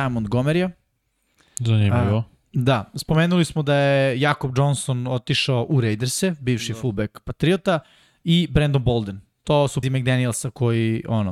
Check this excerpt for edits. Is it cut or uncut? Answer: cut